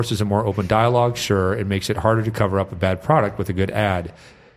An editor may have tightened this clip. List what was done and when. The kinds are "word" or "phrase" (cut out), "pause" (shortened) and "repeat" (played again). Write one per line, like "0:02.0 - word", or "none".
none